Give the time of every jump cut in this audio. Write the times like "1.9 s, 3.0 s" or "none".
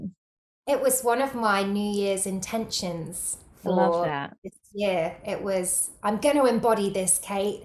none